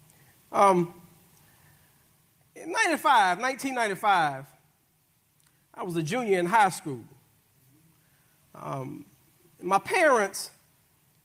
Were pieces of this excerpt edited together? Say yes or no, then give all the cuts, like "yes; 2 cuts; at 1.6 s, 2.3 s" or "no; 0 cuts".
no; 0 cuts